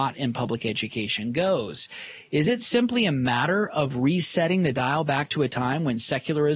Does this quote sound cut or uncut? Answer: uncut